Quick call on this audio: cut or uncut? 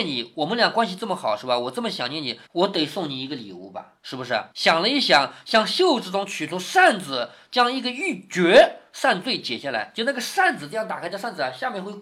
cut